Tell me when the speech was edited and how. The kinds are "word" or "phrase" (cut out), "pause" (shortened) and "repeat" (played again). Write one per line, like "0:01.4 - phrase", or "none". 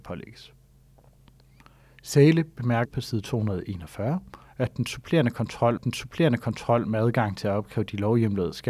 0:02.9 - word
0:05.8 - repeat